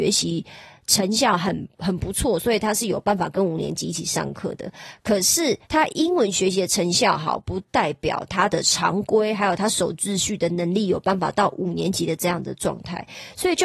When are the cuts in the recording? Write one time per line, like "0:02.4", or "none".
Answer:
0:05.6